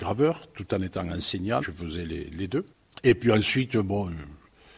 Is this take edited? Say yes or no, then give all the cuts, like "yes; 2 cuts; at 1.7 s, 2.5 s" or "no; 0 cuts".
yes; 1 cut; at 1.6 s